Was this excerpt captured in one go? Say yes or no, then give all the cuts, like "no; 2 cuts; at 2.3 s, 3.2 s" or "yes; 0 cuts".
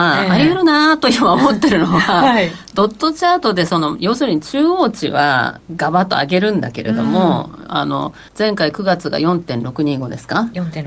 no; 1 cut; at 8.3 s